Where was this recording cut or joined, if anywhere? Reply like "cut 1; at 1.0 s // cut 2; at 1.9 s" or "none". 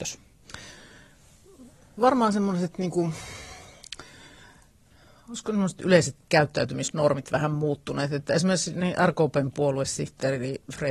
none